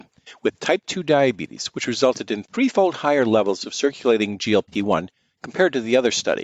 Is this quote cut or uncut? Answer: uncut